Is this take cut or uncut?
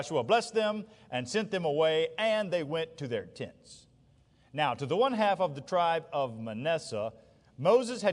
uncut